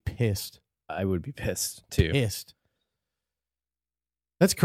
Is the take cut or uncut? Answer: cut